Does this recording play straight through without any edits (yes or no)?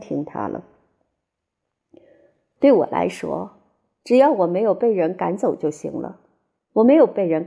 yes